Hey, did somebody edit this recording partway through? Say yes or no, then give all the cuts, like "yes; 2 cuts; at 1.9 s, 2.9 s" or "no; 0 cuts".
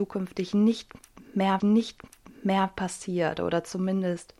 yes; 1 cut; at 1.6 s